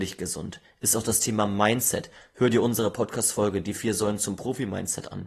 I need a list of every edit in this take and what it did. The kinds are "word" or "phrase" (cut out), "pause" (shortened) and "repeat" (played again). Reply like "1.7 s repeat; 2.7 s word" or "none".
none

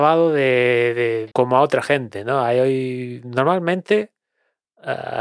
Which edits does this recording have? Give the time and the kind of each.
1.3 s phrase

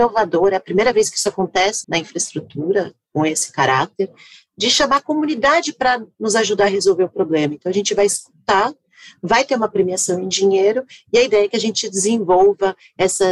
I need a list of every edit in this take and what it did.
1.8 s word

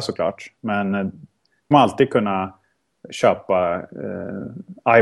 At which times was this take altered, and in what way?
1.7 s word

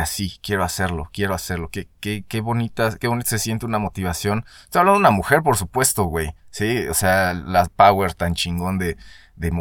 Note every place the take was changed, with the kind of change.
6.4 s pause; 7.7 s phrase

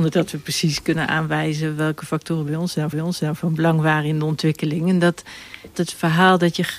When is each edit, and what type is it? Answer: 2.9 s repeat; 5.7 s phrase

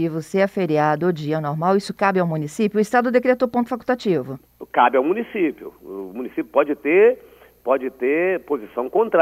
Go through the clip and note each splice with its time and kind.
none

